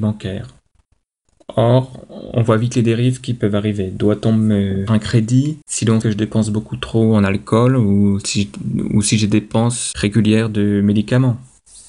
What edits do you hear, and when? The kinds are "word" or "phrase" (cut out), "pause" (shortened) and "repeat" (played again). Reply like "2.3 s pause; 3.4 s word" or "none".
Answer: 4.9 s word; 5.6 s pause; 6.0 s word; 9.9 s word